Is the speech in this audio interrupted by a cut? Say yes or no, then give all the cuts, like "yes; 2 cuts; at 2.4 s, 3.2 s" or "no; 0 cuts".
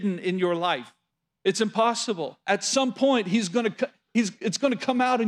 yes; 2 cuts; at 1.1 s, 2.4 s